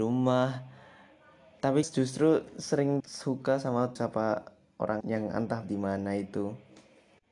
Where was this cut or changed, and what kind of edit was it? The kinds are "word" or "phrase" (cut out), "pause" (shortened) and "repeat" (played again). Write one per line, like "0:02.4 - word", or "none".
0:01.8 - word
0:03.0 - word
0:04.0 - word
0:05.0 - word
0:05.6 - word